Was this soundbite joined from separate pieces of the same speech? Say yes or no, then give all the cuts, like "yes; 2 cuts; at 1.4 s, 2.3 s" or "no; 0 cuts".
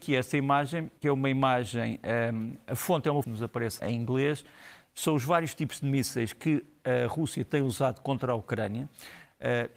yes; 3 cuts; at 1.0 s, 3.2 s, 3.8 s